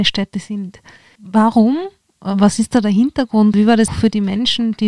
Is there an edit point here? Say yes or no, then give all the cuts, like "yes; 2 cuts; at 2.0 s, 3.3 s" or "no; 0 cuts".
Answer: yes; 2 cuts; at 3.5 s, 3.9 s